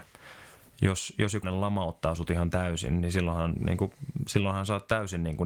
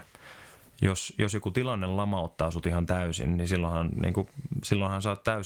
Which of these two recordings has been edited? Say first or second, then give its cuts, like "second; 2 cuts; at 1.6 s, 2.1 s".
first; 1 cut; at 1.4 s